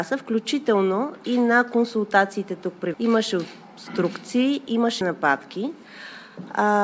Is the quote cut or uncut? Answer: cut